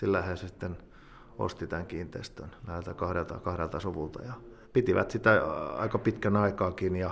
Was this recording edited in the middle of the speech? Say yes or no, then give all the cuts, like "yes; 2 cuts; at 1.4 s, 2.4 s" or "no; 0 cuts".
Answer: yes; 2 cuts; at 2.6 s, 4.6 s